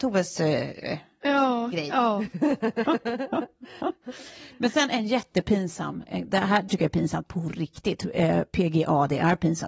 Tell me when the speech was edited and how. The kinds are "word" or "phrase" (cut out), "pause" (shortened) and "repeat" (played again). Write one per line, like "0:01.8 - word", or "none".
0:06.7 - word